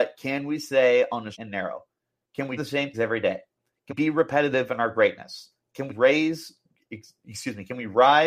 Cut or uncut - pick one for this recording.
cut